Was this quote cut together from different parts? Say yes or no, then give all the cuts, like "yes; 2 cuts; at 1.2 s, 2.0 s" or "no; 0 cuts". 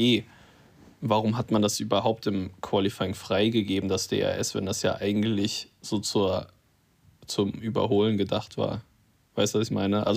no; 0 cuts